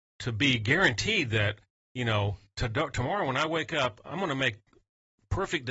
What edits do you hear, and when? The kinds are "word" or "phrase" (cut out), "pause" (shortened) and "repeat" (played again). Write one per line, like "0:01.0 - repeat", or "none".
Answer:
none